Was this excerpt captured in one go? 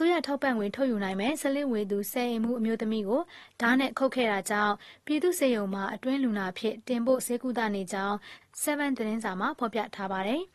no; 1 cut; at 9.0 s

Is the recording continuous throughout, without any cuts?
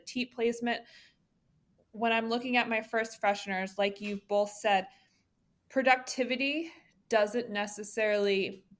yes; 0 cuts

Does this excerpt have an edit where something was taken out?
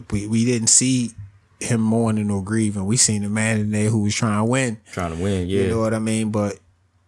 no; 0 cuts

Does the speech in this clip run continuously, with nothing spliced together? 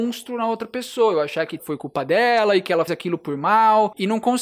no; 2 cuts; at 1.6 s, 2.9 s

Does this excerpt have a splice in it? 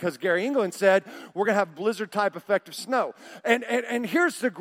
no; 0 cuts

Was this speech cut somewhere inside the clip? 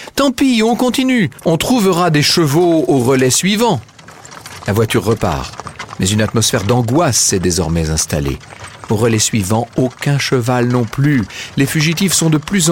yes; 1 cut; at 1.4 s

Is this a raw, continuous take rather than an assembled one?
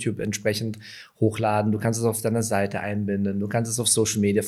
yes; 0 cuts

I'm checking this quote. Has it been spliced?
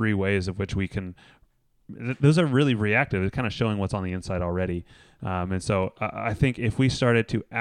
no; 0 cuts

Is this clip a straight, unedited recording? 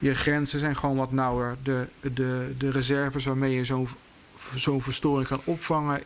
yes; 0 cuts

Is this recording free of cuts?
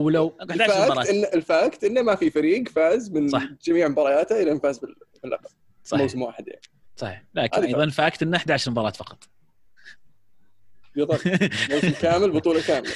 yes; 0 cuts

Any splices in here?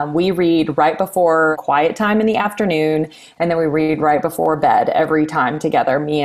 no; 0 cuts

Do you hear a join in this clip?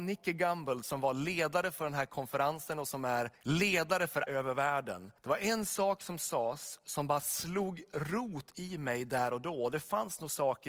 yes; 3 cuts; at 3.4 s, 4.3 s, 5.2 s

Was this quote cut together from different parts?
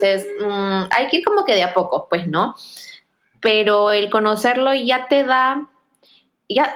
no; 0 cuts

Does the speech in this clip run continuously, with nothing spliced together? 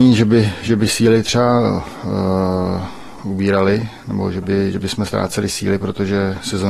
no; 1 cut; at 3.2 s

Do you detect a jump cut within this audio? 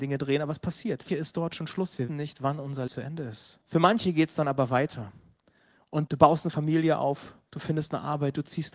yes; 5 cuts; at 1.1 s, 2.1 s, 2.9 s, 3.6 s, 6.1 s

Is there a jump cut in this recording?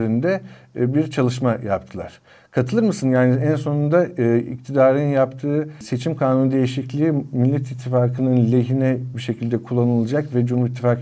no; 0 cuts

